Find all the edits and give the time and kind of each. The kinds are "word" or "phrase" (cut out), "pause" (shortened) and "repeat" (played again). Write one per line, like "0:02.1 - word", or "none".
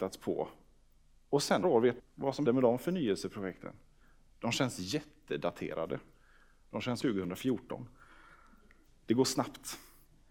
0:01.6 - word
0:02.0 - word
0:02.5 - word
0:07.0 - word